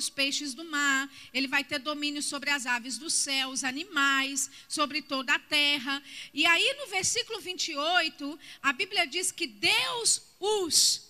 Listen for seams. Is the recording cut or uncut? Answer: uncut